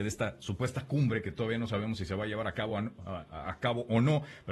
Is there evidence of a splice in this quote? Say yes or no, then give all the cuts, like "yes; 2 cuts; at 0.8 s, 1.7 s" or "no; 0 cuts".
no; 0 cuts